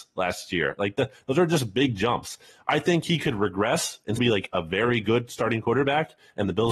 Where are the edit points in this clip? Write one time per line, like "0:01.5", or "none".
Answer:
0:04.2

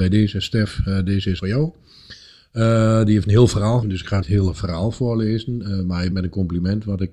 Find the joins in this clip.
0:01.4
0:03.8
0:04.2
0:06.1

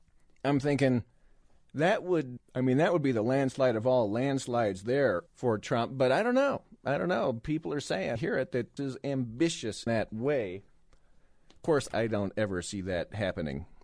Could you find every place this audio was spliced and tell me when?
0:02.4
0:05.3
0:08.2
0:08.8
0:09.9
0:11.9

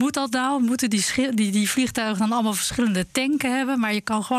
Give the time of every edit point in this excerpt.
none

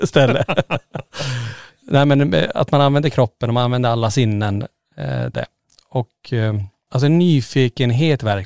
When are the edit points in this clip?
0:05.3
0:06.9

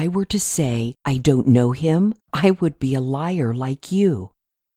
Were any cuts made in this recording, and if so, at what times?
0:01.0
0:02.2

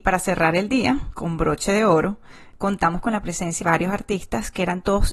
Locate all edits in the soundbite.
0:03.6

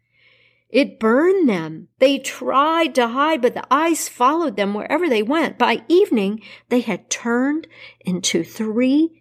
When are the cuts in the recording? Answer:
0:01.9

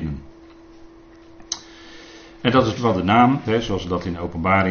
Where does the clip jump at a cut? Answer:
0:02.8
0:03.4

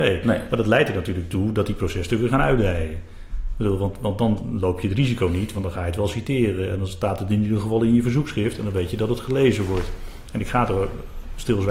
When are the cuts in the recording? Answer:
none

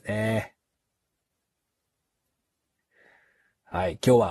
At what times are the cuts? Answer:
none

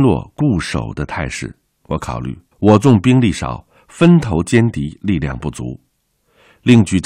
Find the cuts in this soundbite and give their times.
0:02.5

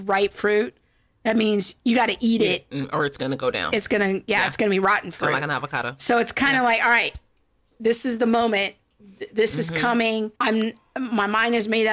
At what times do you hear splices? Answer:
0:10.3

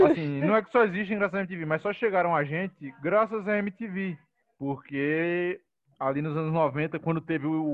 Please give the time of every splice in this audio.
0:04.4

